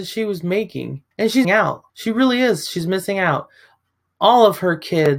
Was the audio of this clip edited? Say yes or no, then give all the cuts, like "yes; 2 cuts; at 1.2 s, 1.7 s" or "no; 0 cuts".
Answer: yes; 3 cuts; at 1.1 s, 1.4 s, 1.9 s